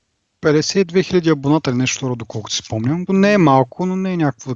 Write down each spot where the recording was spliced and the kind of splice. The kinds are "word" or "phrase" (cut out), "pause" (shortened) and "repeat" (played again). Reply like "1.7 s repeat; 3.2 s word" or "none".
3.1 s word